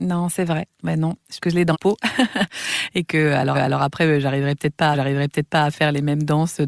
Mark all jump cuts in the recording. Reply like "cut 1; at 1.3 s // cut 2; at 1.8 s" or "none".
cut 1; at 1.4 s // cut 2; at 1.7 s // cut 3; at 3.5 s // cut 4; at 4.9 s